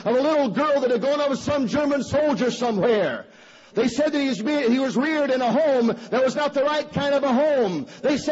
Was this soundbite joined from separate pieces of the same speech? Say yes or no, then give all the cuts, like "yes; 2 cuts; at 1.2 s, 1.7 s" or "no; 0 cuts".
no; 0 cuts